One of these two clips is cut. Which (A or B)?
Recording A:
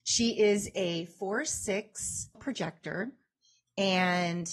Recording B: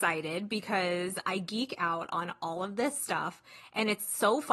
A